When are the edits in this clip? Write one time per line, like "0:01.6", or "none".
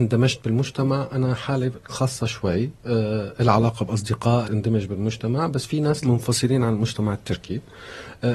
0:01.9
0:04.4
0:06.0